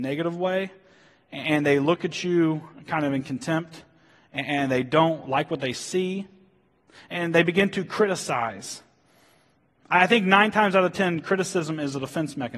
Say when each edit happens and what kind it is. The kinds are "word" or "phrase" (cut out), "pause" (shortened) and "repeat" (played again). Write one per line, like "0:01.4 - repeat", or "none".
none